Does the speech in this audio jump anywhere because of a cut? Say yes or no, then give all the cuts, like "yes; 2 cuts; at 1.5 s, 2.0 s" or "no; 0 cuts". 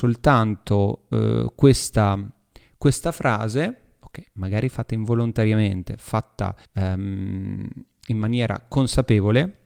yes; 1 cut; at 6.6 s